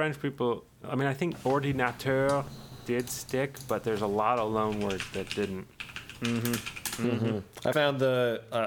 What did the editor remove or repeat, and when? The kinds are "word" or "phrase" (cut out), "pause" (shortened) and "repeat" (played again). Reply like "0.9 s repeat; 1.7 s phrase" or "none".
7.7 s word